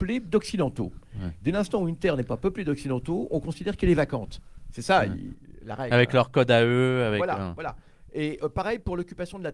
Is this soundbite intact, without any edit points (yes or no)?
yes